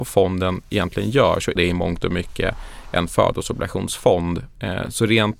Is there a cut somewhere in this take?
yes; 1 cut; at 1.6 s

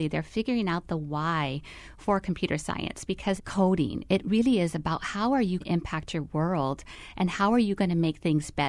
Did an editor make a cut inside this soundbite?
yes; 2 cuts; at 3.4 s, 5.6 s

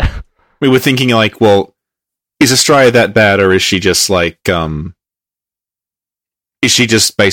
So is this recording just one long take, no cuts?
yes; 0 cuts

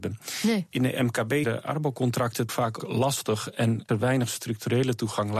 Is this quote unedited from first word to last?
no; 4 cuts; at 1.4 s, 2.5 s, 2.8 s, 3.9 s

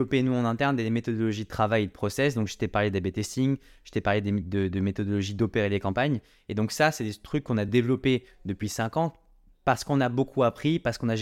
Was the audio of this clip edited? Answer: no; 0 cuts

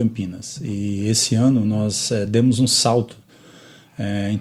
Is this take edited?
no; 0 cuts

